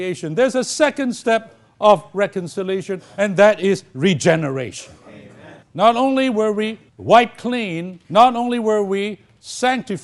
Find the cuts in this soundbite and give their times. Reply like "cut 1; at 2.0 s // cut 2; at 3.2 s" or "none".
cut 1; at 5.6 s // cut 2; at 6.9 s // cut 3; at 8.0 s